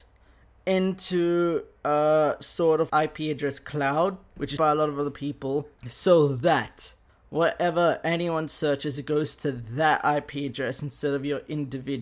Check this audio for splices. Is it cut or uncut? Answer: cut